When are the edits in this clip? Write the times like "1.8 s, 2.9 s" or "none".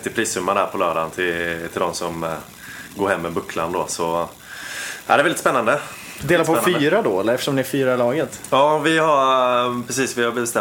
none